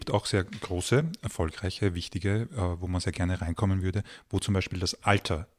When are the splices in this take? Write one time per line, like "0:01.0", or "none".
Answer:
none